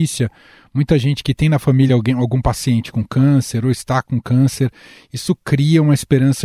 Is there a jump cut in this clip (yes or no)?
no